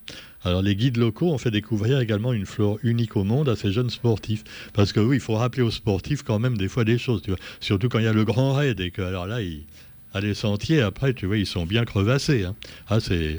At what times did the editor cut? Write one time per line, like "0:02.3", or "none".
none